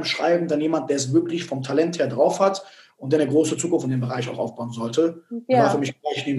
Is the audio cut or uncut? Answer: uncut